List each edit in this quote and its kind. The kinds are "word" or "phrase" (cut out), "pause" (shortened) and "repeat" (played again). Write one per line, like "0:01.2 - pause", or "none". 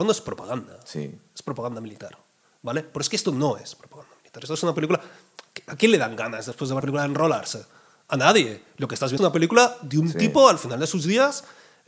0:06.8 - word
0:09.2 - word